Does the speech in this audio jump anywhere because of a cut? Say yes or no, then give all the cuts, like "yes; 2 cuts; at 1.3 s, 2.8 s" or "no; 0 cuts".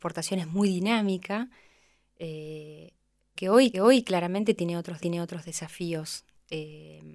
yes; 3 cuts; at 3.4 s, 3.7 s, 5.0 s